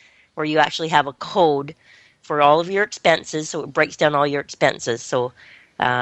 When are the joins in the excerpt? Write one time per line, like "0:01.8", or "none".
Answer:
none